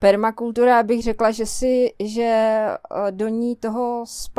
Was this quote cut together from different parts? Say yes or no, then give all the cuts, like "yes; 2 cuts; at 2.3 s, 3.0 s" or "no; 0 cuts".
no; 0 cuts